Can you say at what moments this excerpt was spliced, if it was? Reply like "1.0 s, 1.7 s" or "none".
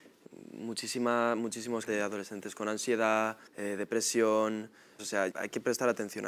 1.9 s, 3.5 s, 5.0 s, 5.3 s